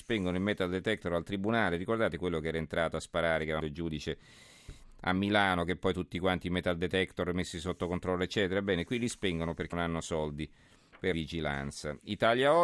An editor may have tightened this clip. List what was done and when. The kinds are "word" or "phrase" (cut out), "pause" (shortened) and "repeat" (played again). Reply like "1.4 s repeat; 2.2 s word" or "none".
3.6 s word; 9.7 s word; 11.1 s word